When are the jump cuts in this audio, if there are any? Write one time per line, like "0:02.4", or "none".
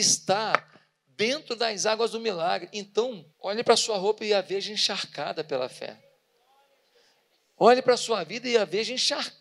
0:03.3

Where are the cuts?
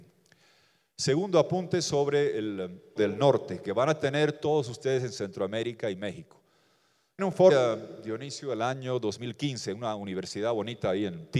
0:03.0
0:07.2
0:07.5

